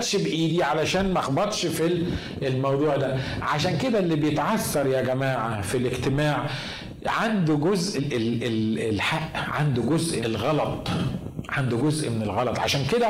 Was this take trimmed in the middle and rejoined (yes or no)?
yes